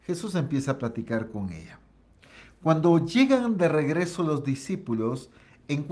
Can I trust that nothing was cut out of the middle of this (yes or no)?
yes